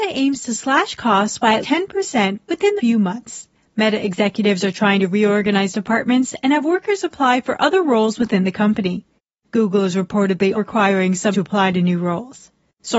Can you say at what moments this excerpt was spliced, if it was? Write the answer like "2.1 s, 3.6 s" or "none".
1.6 s, 2.8 s, 10.5 s, 11.3 s